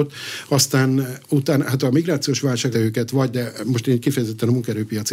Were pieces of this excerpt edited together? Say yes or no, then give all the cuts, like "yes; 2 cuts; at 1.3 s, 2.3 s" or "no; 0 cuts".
yes; 2 cuts; at 2.7 s, 3.3 s